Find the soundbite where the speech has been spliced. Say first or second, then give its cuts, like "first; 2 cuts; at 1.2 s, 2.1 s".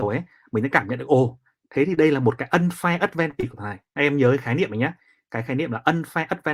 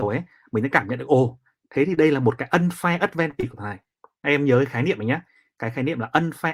first; 1 cut; at 3.9 s